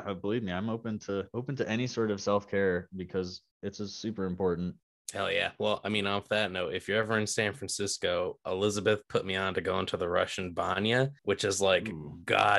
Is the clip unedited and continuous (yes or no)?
no